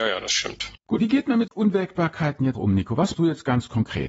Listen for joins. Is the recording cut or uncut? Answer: cut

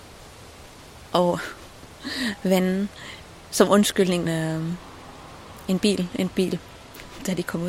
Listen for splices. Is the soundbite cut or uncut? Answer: cut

